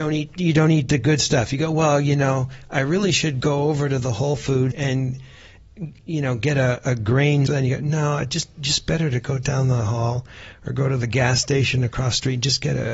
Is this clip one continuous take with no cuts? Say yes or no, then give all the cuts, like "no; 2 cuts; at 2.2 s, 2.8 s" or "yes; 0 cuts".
no; 2 cuts; at 4.7 s, 7.5 s